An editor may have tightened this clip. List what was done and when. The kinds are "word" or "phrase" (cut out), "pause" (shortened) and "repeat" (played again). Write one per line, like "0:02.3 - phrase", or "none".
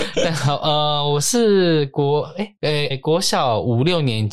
0:02.9 - word